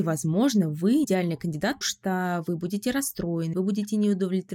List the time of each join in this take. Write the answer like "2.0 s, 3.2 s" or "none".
1.0 s, 1.8 s, 3.5 s